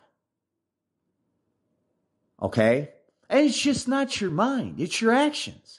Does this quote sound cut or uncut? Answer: uncut